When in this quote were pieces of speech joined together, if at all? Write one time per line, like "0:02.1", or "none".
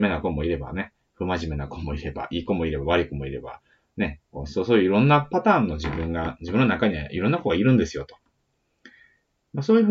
none